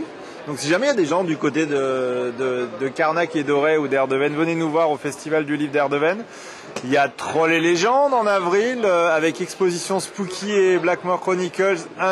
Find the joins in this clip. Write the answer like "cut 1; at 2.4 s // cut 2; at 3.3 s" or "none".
none